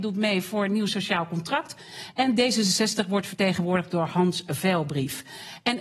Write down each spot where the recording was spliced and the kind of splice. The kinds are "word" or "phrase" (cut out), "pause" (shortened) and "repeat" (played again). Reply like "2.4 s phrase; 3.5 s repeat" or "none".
none